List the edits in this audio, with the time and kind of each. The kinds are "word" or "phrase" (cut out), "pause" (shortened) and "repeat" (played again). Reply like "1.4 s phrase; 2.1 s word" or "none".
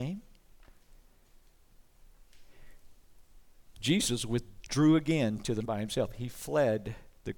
5.6 s word